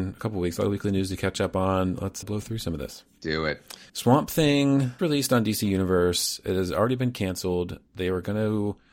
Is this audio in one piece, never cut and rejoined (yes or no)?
no